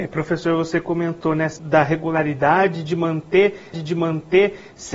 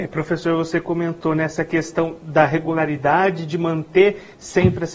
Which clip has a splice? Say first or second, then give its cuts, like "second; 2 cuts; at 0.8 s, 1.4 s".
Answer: first; 2 cuts; at 1.6 s, 3.7 s